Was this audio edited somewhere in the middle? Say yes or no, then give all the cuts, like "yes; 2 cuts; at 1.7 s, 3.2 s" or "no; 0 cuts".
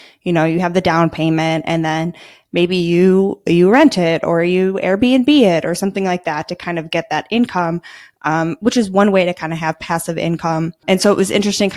no; 0 cuts